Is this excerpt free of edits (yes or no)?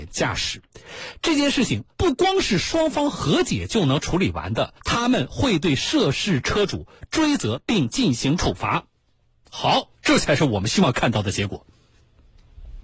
no